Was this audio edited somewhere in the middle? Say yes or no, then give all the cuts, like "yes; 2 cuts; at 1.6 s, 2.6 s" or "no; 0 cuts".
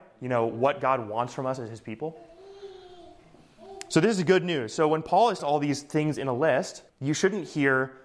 yes; 2 cuts; at 5.4 s, 6.9 s